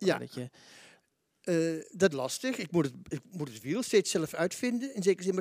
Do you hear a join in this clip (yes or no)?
yes